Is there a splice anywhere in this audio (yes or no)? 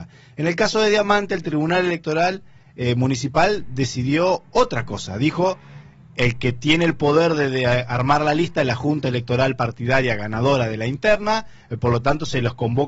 no